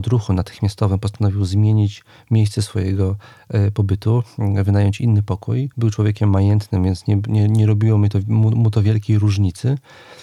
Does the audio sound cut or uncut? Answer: cut